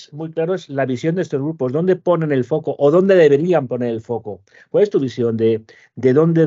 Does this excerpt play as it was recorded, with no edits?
yes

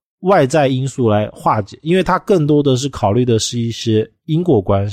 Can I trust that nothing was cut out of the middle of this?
yes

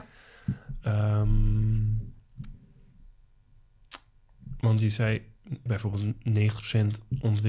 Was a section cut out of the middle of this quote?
yes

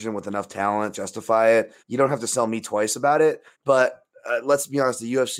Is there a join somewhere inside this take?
yes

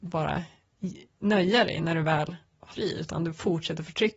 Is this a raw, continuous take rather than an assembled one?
no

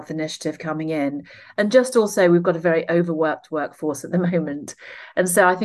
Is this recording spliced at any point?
no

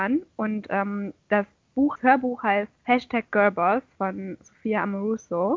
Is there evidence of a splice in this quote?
yes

